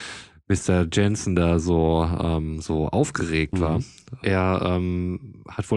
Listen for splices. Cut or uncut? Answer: uncut